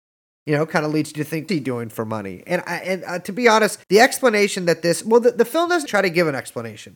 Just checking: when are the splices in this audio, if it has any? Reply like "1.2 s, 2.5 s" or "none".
1.5 s, 3.8 s, 5.9 s